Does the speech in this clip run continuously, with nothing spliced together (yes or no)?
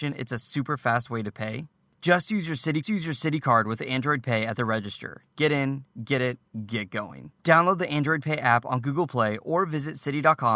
no